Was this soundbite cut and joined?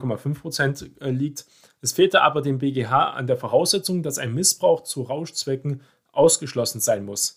no; 0 cuts

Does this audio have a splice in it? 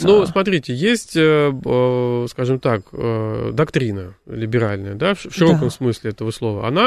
no; 0 cuts

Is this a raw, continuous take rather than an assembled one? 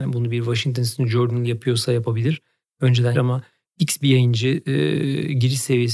no; 1 cut; at 3.1 s

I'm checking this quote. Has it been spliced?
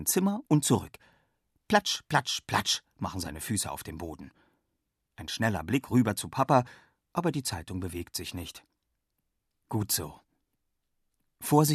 no; 0 cuts

